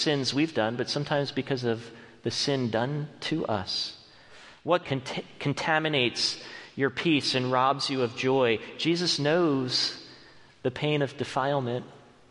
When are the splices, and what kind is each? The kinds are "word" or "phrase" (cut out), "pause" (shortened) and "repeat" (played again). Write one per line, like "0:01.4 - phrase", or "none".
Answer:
0:04.8 - word